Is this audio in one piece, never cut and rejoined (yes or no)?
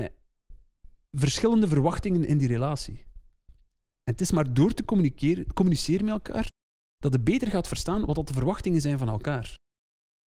yes